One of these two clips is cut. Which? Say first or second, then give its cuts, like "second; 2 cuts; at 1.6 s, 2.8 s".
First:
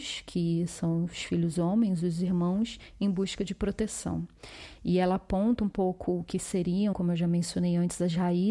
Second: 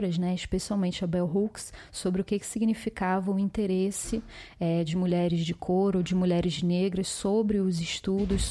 first; 1 cut; at 6.9 s